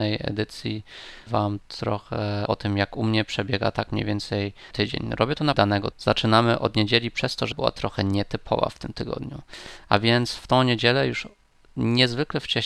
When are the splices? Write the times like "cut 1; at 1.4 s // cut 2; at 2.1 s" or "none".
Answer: cut 1; at 1.3 s // cut 2; at 2.5 s // cut 3; at 4.7 s // cut 4; at 5.5 s // cut 5; at 5.9 s // cut 6; at 7.5 s